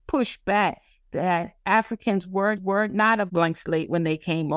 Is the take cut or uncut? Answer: cut